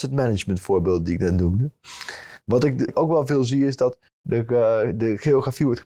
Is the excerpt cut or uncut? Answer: cut